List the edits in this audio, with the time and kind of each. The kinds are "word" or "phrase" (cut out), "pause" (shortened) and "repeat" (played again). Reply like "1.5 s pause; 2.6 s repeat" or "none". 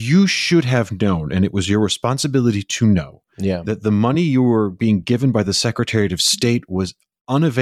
none

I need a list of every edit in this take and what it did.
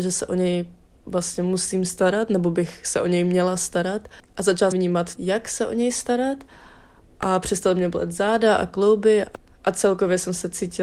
4.7 s word; 5.2 s word

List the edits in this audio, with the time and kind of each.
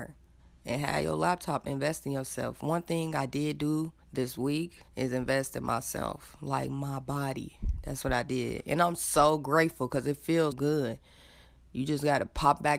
4.0 s pause; 4.9 s pause; 10.5 s word

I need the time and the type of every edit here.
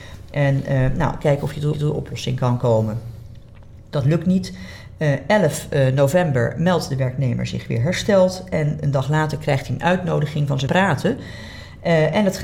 1.7 s repeat; 10.7 s phrase

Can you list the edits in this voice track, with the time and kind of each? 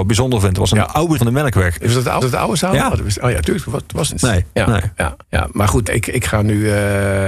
1.2 s word; 2.2 s repeat; 4.1 s phrase; 5.2 s pause; 5.9 s word

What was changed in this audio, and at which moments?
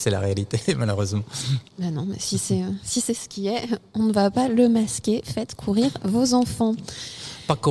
1.7 s pause

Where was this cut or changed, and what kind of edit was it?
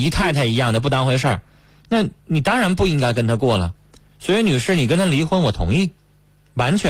2.2 s pause

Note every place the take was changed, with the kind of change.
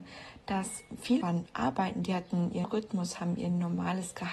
1.2 s word; 2.6 s word

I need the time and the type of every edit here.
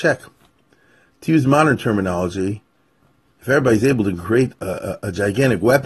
none

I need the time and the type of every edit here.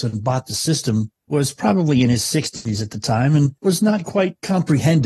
1.2 s pause

